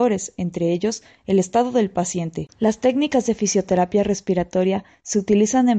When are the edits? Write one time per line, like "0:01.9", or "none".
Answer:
0:02.5